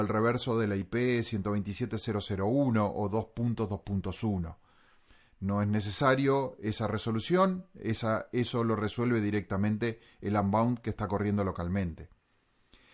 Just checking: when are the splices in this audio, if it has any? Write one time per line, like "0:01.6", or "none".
none